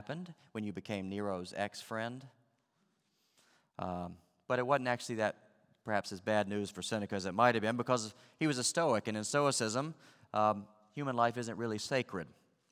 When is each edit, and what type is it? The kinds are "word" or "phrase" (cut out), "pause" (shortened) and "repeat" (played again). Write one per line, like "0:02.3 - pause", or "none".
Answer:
none